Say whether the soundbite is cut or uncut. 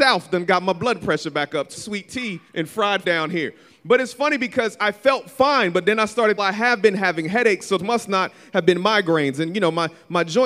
cut